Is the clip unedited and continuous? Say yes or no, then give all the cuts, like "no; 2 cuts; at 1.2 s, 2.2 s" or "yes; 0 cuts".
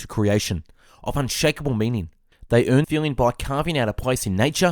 no; 1 cut; at 2.8 s